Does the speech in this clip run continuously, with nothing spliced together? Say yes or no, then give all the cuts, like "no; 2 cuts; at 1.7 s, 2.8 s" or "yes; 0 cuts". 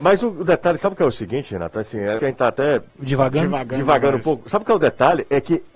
no; 2 cuts; at 2.2 s, 2.9 s